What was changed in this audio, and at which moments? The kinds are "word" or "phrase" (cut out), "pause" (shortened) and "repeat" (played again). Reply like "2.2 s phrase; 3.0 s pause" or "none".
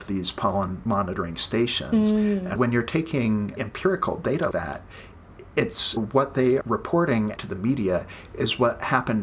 2.6 s word; 3.6 s word; 4.5 s word; 6.0 s word; 6.6 s word; 7.4 s word